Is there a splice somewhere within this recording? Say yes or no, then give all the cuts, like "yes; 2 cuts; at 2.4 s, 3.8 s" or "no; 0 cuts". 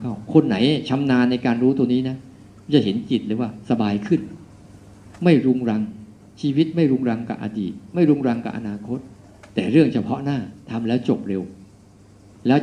no; 0 cuts